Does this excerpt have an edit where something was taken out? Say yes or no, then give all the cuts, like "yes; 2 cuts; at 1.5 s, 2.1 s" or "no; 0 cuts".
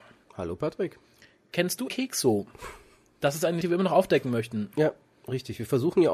yes; 2 cuts; at 1.9 s, 3.6 s